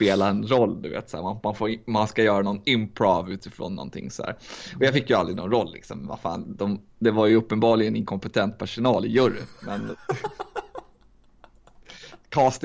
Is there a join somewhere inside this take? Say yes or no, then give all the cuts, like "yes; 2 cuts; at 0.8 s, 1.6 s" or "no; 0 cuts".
no; 0 cuts